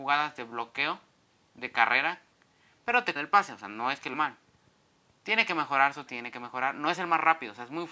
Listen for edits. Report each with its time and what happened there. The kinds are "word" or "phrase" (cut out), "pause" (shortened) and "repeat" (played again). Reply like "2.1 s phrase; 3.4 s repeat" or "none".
3.2 s word; 4.1 s word; 6.1 s word